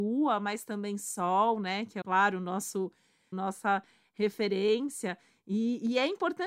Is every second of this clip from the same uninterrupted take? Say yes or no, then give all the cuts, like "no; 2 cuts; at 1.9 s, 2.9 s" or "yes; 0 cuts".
no; 2 cuts; at 2.0 s, 3.3 s